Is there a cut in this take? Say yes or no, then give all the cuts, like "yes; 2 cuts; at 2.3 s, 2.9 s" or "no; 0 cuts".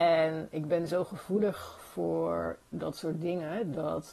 no; 0 cuts